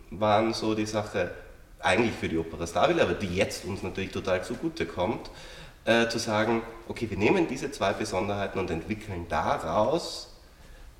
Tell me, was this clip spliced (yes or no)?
no